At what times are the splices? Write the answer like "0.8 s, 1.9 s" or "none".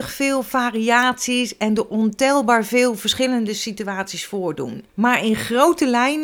4.9 s